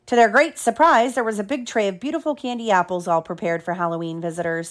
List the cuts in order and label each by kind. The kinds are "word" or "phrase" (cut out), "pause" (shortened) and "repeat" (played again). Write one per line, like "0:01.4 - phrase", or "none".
none